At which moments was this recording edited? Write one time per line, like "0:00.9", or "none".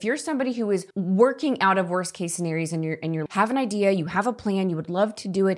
0:00.9
0:03.3